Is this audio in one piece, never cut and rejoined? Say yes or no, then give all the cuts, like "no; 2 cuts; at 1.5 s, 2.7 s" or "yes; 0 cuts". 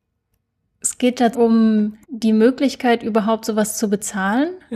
no; 2 cuts; at 1.3 s, 2.0 s